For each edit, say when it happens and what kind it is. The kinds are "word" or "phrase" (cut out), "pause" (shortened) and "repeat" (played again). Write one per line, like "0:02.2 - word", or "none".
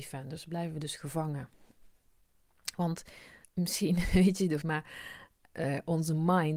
0:03.4 - pause
0:04.6 - word